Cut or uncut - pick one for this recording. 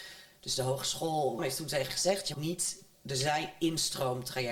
cut